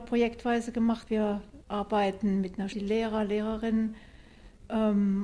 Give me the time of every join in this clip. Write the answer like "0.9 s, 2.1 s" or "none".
1.1 s, 1.6 s, 2.7 s